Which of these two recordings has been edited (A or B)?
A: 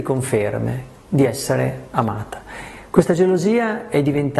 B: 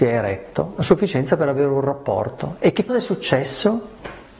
B